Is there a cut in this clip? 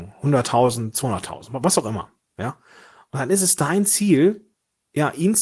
no; 0 cuts

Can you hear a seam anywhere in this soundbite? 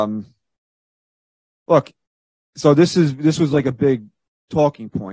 no; 0 cuts

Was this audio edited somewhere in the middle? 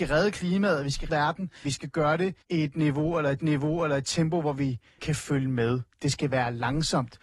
yes; 5 cuts; at 1.1 s, 1.6 s, 2.4 s, 3.4 s, 5.0 s

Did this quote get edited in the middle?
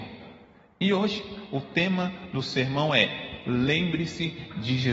no; 0 cuts

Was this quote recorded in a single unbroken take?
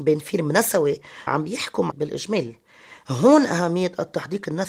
no; 2 cuts; at 1.3 s, 1.9 s

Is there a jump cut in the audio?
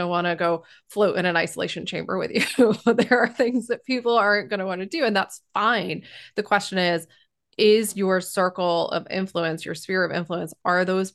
no; 0 cuts

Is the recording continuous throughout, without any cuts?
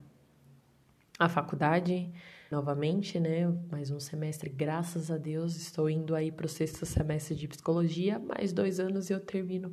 no; 1 cut; at 2.5 s

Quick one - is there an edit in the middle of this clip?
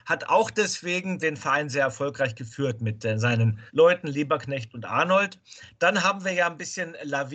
yes; 2 cuts; at 1.2 s, 3.7 s

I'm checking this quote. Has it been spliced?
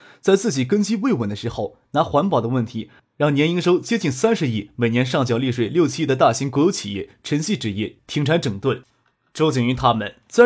no; 0 cuts

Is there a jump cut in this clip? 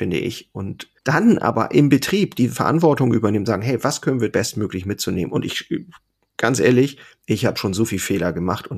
yes; 2 cuts; at 1.0 s, 4.3 s

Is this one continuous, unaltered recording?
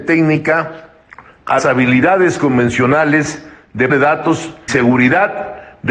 no; 3 cuts; at 1.6 s, 3.9 s, 4.7 s

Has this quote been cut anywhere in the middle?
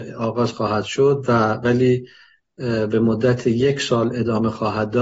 no; 0 cuts

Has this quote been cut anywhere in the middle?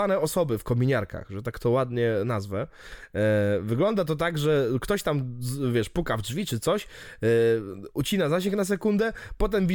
no; 0 cuts

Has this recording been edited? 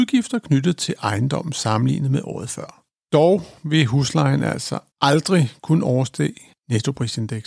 yes; 1 cut; at 4.9 s

